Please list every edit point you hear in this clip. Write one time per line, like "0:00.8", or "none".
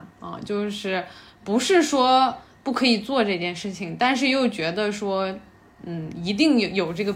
none